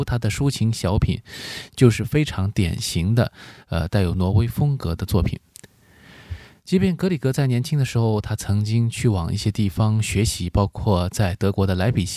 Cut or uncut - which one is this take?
uncut